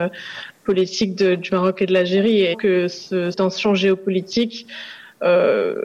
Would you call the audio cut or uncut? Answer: cut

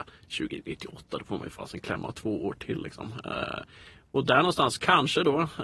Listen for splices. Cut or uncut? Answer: uncut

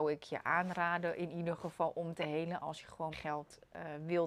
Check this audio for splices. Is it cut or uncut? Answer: cut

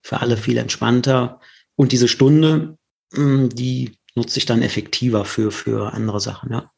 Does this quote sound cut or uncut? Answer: uncut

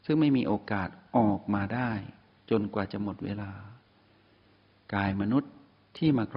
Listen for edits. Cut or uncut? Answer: uncut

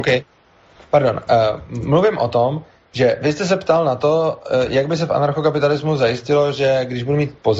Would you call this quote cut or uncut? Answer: uncut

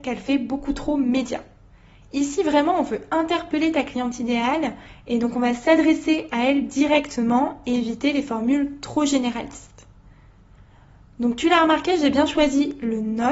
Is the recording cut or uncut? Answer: uncut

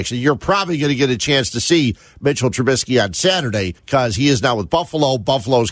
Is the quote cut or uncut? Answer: cut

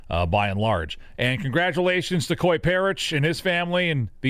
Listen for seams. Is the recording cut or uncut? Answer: uncut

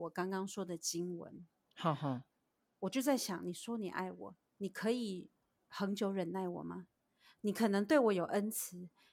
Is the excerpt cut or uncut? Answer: uncut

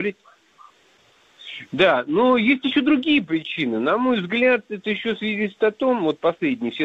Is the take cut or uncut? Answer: uncut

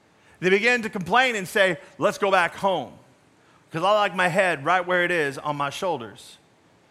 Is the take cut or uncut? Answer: uncut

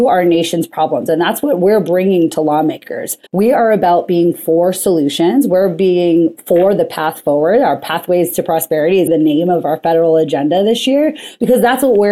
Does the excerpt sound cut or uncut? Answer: cut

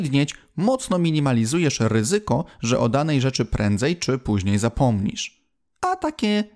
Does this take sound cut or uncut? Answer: uncut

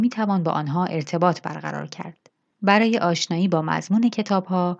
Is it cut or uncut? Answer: uncut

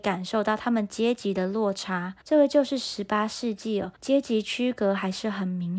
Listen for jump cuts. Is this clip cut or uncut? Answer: cut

